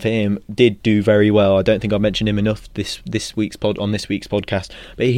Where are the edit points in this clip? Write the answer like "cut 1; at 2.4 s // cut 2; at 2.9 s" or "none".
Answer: none